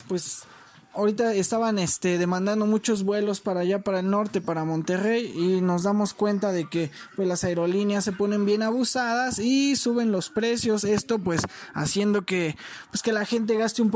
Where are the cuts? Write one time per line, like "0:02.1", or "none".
none